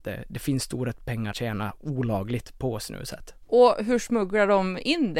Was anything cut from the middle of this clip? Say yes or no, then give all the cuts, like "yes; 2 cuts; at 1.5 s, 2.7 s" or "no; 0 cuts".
yes; 2 cuts; at 1.3 s, 3.4 s